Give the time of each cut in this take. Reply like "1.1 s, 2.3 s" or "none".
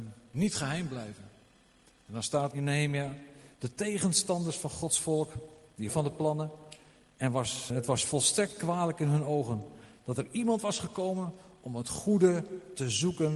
2.5 s, 5.9 s, 7.7 s